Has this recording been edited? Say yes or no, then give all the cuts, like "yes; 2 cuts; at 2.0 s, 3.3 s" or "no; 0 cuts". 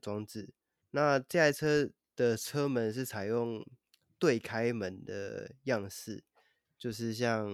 no; 0 cuts